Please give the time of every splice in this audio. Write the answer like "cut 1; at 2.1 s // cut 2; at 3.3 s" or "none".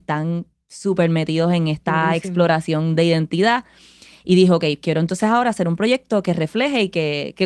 none